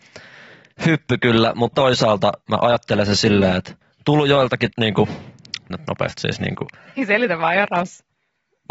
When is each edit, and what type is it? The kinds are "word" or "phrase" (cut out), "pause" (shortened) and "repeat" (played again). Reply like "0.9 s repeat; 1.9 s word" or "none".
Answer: 1.7 s phrase; 2.4 s pause; 3.8 s pause; 4.7 s word; 5.7 s word; 6.2 s word